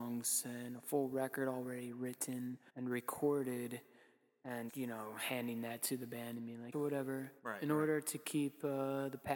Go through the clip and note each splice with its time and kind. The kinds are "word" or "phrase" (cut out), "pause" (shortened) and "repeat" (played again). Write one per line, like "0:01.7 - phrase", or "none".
0:02.7 - pause
0:04.7 - word
0:06.7 - phrase
0:07.4 - pause